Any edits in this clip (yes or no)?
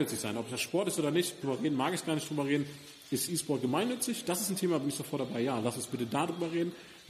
yes